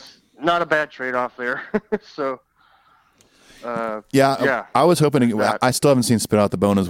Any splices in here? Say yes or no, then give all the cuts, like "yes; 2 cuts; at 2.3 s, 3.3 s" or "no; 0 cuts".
no; 0 cuts